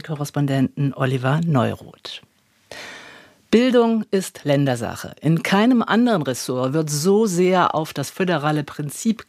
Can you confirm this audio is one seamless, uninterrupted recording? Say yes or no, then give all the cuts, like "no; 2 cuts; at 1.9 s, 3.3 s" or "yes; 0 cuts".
yes; 0 cuts